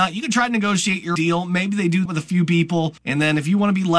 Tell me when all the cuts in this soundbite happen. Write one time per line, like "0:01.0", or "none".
0:01.2
0:02.1
0:03.0